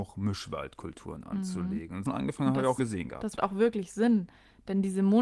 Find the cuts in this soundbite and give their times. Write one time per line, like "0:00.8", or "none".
0:02.0
0:02.8
0:03.3